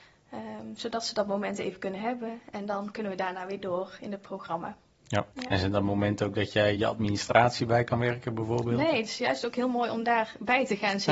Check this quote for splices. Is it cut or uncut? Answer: cut